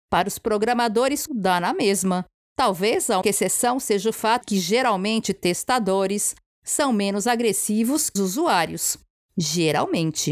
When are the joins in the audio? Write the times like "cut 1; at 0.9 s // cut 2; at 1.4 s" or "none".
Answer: cut 1; at 1.3 s // cut 2; at 3.2 s // cut 3; at 4.4 s // cut 4; at 8.2 s